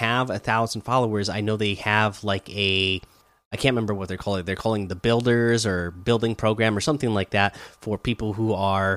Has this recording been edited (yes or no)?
yes